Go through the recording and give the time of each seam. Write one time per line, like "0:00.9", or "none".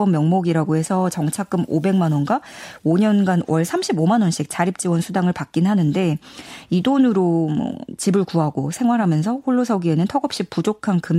none